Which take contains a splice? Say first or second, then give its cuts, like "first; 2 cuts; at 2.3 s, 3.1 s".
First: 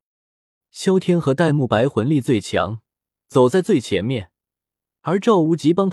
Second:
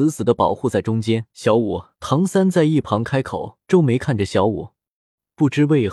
second; 3 cuts; at 1.3 s, 1.9 s, 3.6 s